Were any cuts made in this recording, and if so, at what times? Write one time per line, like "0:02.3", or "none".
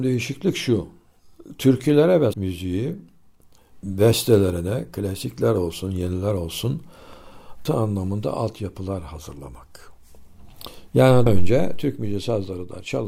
0:02.3
0:07.7
0:11.3